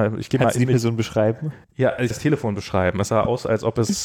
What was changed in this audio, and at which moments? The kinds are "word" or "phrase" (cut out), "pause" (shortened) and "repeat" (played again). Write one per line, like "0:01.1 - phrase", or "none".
0:01.6 - pause
0:02.1 - word

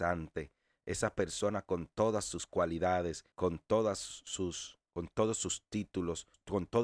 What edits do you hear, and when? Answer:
0:03.3 - pause

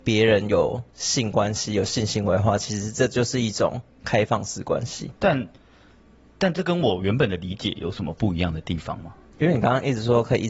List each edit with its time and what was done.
0:05.2 - pause

